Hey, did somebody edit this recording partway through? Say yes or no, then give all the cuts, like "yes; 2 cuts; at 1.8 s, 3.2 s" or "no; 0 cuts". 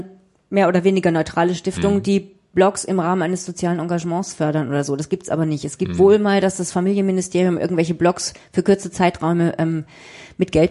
no; 0 cuts